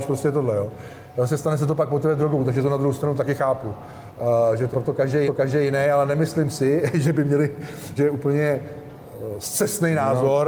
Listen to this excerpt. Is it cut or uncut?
cut